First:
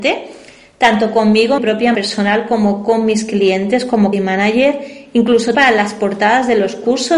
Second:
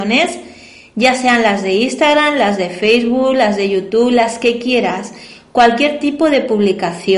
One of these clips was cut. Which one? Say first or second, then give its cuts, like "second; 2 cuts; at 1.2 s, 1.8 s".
first; 4 cuts; at 1.6 s, 1.9 s, 4.1 s, 5.5 s